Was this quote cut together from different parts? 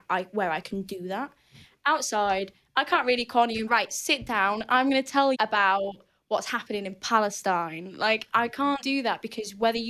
yes; 3 cuts; at 3.7 s, 5.3 s, 8.8 s

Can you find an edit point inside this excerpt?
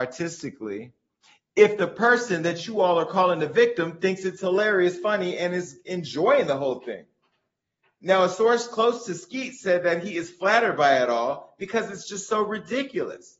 no; 0 cuts

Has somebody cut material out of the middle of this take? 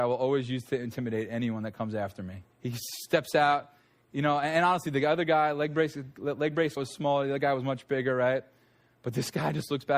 yes; 2 cuts; at 2.5 s, 6.8 s

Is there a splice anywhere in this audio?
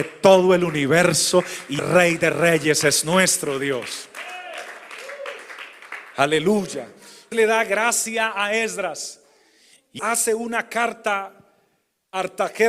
yes; 3 cuts; at 1.8 s, 7.3 s, 10.0 s

